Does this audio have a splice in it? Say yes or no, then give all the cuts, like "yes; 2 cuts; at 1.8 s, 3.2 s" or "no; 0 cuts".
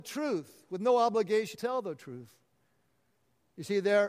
yes; 1 cut; at 1.5 s